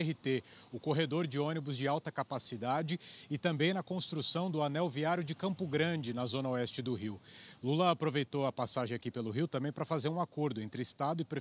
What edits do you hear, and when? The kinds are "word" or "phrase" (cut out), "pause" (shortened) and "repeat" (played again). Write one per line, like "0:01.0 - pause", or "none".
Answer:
none